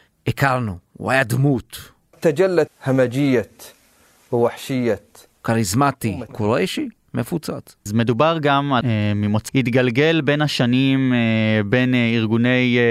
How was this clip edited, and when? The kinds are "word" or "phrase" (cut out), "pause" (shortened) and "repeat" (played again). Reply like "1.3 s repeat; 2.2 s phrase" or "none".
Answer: 2.1 s word; 2.7 s word; 6.3 s word; 7.9 s word; 8.8 s word; 9.5 s word